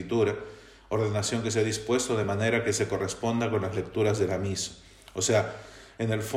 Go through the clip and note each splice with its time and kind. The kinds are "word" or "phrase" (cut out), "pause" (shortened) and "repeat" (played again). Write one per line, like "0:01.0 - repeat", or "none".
none